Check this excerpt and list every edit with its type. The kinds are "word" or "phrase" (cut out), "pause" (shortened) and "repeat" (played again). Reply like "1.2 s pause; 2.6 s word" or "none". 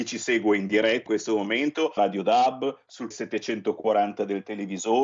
1.1 s word; 2.0 s word; 3.1 s word